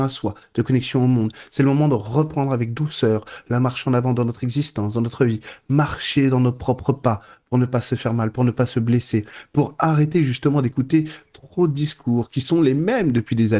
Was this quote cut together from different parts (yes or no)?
no